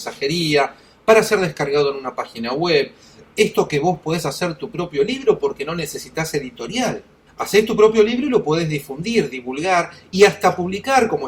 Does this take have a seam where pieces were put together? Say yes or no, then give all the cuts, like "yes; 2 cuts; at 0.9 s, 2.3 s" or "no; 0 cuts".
no; 0 cuts